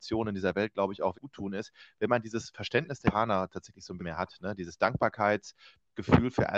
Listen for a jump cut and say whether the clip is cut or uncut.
cut